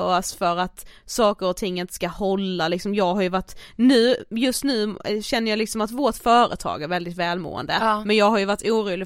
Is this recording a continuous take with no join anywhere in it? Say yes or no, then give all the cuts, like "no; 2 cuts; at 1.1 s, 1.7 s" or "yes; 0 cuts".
yes; 0 cuts